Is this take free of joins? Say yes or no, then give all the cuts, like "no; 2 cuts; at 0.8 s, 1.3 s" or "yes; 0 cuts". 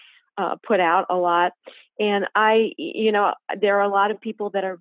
yes; 0 cuts